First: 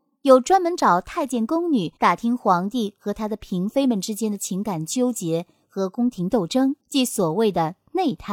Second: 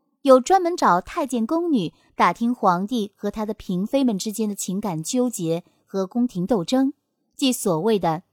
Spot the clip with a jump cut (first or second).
first